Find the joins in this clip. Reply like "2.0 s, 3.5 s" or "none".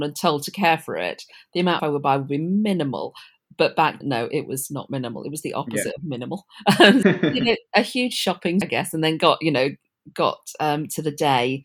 1.8 s, 4.0 s, 7.0 s, 8.6 s